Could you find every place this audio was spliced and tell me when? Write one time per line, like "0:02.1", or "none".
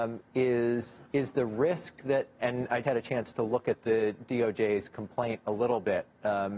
0:01.1
0:02.4
0:02.8